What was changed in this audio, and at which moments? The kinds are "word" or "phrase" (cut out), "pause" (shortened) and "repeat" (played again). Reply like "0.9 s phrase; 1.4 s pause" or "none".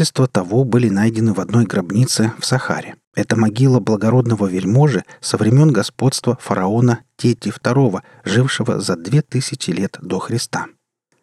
3.0 s pause